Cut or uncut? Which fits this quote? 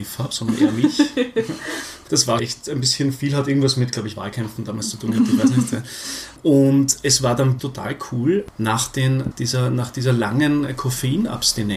cut